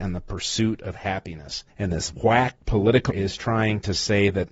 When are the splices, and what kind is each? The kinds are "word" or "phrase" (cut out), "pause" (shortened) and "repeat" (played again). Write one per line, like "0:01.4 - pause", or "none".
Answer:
0:01.7 - pause
0:02.6 - word
0:03.1 - word